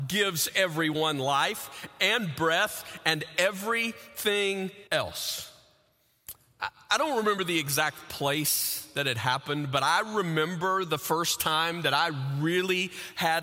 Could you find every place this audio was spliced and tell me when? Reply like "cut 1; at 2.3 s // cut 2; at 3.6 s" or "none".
cut 1; at 4.9 s